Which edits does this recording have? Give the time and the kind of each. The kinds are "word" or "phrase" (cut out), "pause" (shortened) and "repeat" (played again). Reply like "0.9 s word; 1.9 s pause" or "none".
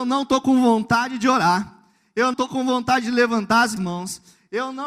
2.3 s word; 3.8 s word